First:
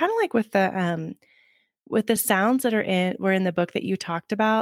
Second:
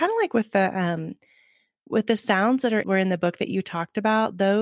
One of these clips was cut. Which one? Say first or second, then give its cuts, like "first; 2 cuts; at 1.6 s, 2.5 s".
second; 1 cut; at 2.8 s